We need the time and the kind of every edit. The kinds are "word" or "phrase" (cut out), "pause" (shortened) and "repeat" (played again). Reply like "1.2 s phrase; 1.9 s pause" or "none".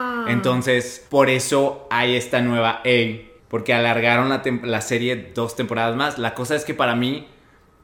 1.1 s pause; 3.4 s pause

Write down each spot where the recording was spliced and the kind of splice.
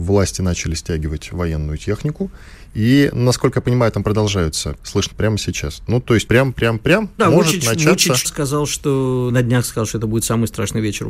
4.8 s word; 5.1 s word; 6.3 s word; 7.2 s word; 8.2 s word; 9.3 s word

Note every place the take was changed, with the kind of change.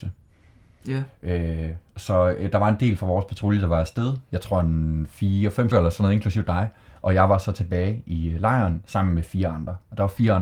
5.7 s word

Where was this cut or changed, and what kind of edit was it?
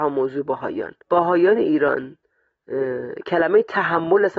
1.0 s pause

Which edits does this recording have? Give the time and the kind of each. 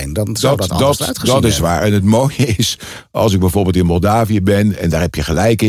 none

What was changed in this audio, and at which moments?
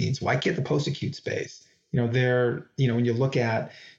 none

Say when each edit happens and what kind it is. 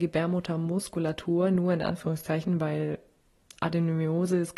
none

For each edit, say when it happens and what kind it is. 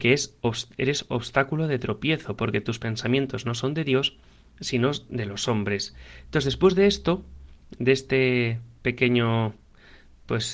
none

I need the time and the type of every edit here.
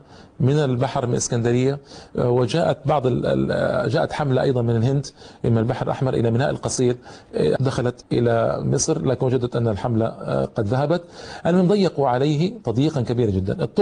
7.6 s word; 8.0 s word

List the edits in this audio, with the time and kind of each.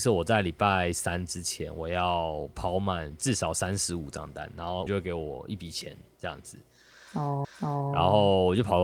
4.9 s word; 7.4 s repeat

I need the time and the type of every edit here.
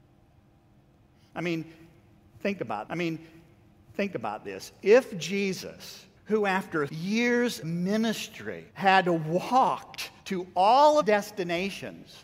2.9 s repeat; 6.2 s pause; 6.9 s word; 7.6 s word; 8.7 s pause; 10.2 s pause; 11.0 s phrase

